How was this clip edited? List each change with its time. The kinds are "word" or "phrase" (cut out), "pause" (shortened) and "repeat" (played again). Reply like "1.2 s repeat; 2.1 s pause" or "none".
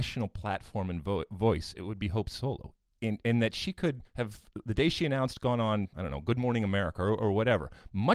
4.1 s pause

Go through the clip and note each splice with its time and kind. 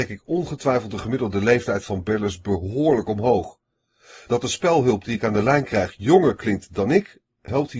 none

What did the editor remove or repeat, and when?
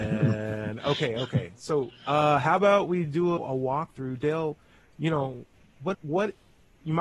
3.4 s word; 5.9 s word

